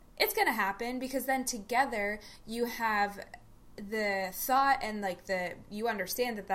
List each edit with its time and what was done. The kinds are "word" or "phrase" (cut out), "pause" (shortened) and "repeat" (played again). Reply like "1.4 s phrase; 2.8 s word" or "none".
none